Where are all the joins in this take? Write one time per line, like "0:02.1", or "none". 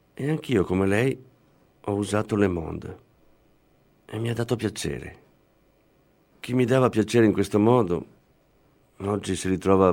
none